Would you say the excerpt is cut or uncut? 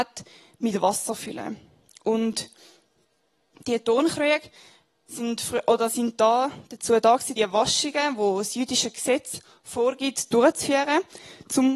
cut